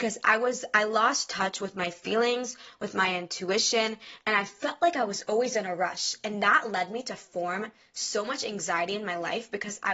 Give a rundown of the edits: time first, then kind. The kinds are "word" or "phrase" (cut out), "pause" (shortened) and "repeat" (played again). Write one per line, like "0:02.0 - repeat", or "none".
none